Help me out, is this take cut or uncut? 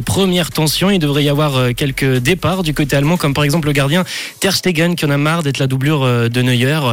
uncut